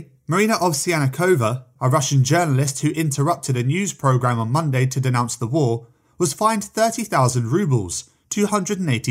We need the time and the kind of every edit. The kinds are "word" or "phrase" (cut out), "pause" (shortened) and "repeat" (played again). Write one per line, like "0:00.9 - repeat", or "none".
none